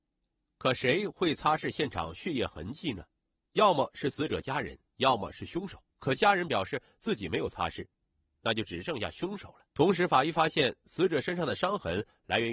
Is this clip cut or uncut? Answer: cut